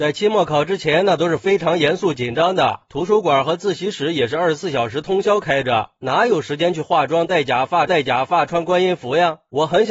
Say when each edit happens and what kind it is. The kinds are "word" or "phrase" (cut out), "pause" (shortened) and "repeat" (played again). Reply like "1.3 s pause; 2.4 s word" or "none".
7.9 s repeat